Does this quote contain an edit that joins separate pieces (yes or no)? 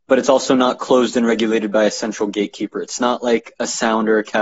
no